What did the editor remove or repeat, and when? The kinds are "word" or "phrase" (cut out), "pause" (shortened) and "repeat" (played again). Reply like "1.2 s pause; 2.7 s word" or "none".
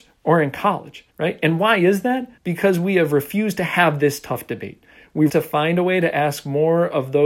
1.1 s pause; 2.4 s pause; 5.3 s word